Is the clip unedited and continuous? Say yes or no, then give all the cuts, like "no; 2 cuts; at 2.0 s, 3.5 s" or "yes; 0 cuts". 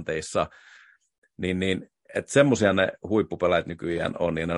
yes; 0 cuts